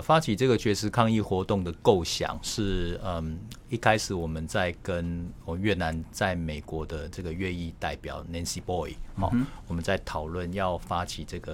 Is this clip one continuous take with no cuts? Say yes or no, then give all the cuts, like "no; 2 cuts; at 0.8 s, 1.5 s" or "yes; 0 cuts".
no; 1 cut; at 2.4 s